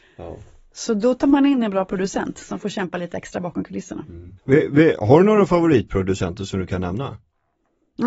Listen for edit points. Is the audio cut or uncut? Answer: cut